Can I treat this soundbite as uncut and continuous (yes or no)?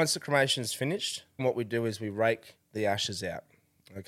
no